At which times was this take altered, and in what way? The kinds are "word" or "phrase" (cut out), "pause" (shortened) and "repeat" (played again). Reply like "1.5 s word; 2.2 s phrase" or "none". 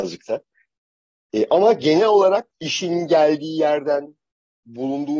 2.5 s pause